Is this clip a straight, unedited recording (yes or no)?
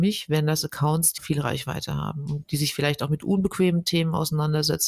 no